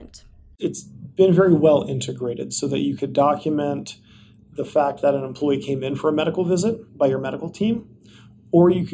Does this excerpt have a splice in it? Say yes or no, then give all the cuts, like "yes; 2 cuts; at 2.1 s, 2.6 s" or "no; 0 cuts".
yes; 1 cut; at 6.9 s